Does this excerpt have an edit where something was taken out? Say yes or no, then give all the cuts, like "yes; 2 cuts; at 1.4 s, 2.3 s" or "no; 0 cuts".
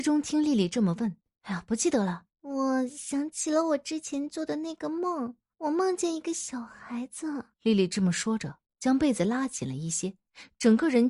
yes; 4 cuts; at 1.2 s, 2.3 s, 5.5 s, 7.5 s